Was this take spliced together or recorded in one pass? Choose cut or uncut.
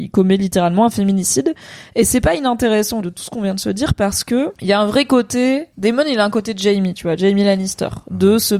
cut